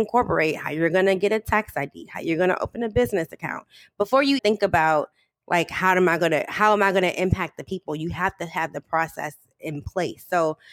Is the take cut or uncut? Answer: cut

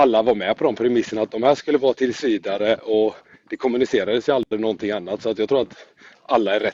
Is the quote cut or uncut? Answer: uncut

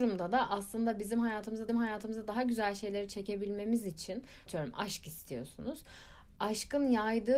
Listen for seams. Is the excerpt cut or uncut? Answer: cut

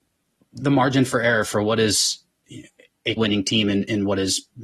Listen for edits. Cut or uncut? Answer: cut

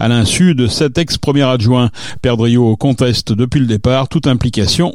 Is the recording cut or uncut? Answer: uncut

